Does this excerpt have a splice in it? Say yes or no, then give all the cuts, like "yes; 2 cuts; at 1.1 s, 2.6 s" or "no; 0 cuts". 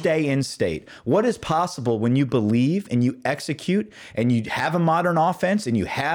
no; 0 cuts